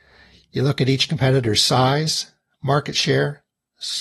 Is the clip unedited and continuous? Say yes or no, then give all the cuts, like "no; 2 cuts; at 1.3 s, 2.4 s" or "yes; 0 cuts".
yes; 0 cuts